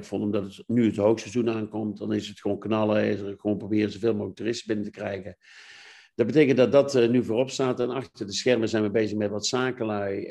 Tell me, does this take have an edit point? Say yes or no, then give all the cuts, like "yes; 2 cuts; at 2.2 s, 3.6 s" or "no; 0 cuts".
no; 0 cuts